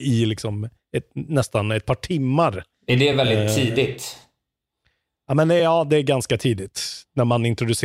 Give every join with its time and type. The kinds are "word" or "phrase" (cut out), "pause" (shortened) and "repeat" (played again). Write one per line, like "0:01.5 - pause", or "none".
none